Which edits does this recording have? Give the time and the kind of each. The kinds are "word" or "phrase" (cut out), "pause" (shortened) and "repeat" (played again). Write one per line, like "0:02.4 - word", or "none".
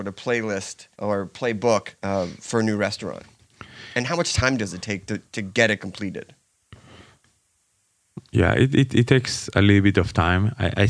0:00.9 - pause
0:02.0 - pause